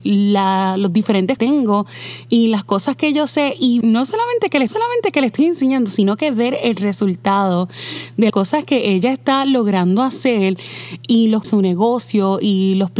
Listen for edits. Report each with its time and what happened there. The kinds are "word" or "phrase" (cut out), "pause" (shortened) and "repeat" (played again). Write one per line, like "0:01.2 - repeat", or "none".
0:01.4 - phrase
0:03.8 - word
0:04.7 - repeat
0:08.3 - word
0:11.4 - phrase